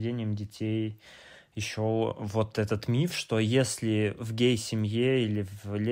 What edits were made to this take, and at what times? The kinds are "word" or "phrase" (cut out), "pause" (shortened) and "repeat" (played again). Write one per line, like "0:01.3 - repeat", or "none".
none